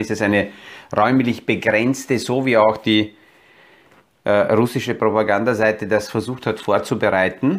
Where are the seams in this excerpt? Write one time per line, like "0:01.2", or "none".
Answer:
none